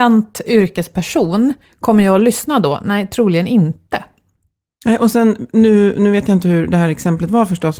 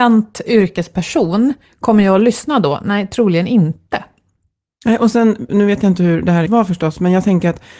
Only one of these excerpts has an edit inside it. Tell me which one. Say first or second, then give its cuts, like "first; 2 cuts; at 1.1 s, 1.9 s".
second; 2 cuts; at 5.5 s, 6.5 s